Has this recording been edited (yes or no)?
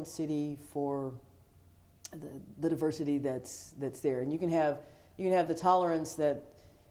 no